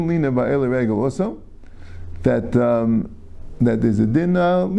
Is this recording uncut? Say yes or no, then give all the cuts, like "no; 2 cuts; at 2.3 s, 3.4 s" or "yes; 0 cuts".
yes; 0 cuts